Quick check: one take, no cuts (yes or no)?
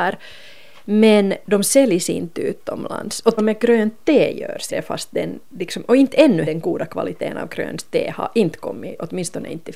no